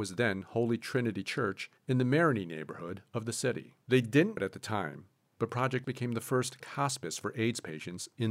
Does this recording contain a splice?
yes; 5 cuts; at 1.8 s, 3.8 s, 4.4 s, 5.8 s, 6.6 s

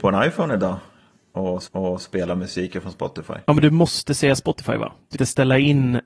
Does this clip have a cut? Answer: yes; 3 cuts; at 1.7 s, 3.4 s, 5.1 s

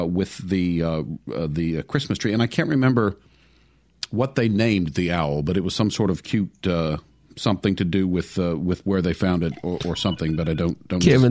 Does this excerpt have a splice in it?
no; 0 cuts

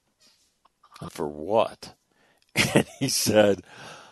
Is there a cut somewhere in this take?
yes; 1 cut; at 1.1 s

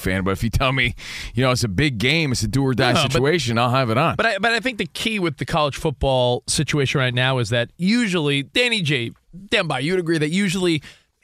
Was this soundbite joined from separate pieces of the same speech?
no; 0 cuts

